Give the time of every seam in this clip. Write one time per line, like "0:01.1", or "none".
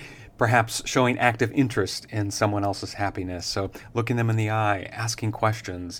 none